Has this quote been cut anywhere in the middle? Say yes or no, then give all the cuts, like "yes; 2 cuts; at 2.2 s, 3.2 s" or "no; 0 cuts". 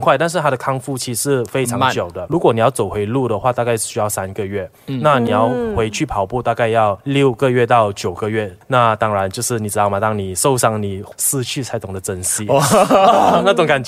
yes; 1 cut; at 2.3 s